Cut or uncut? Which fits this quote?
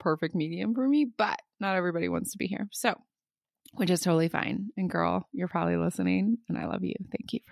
uncut